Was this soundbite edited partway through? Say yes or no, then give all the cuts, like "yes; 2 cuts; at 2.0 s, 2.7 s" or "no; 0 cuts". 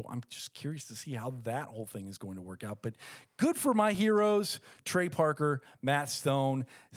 no; 0 cuts